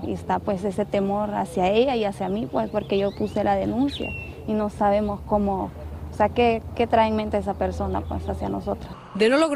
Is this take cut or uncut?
uncut